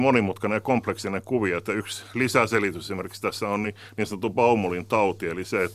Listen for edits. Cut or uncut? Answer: uncut